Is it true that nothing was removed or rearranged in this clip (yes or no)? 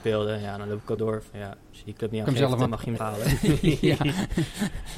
no